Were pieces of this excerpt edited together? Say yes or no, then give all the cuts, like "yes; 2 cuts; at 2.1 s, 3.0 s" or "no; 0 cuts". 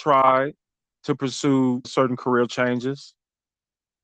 yes; 1 cut; at 1.8 s